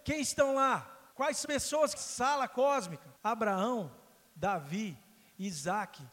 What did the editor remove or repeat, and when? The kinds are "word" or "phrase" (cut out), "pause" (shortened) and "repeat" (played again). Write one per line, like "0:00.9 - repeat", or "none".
0:01.1 - pause
0:01.4 - word
0:02.0 - phrase
0:03.2 - pause